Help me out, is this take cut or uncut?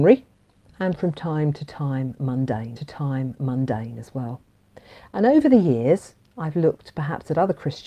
cut